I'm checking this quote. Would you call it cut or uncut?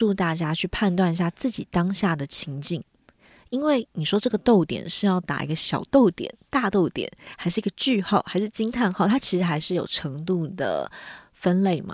uncut